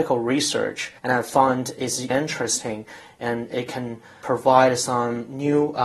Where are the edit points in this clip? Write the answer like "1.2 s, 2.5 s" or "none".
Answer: 1.0 s, 2.1 s